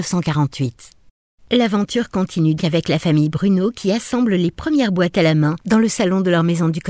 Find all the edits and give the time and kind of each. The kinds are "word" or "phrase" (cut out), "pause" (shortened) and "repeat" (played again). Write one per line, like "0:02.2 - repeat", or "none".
0:02.6 - word